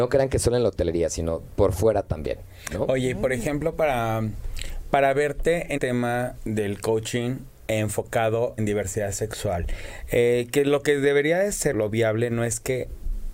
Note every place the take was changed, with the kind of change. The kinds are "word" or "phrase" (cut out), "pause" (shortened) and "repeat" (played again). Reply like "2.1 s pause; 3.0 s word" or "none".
5.8 s word; 8.6 s phrase; 11.7 s word